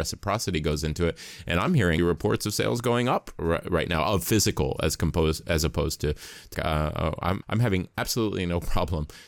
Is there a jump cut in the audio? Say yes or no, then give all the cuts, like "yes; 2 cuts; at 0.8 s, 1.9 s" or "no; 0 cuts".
yes; 3 cuts; at 2.0 s, 6.5 s, 7.4 s